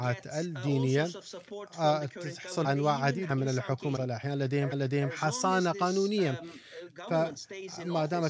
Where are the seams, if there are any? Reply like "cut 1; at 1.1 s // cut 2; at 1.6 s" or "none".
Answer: cut 1; at 2.6 s // cut 2; at 3.3 s // cut 3; at 4.0 s // cut 4; at 4.7 s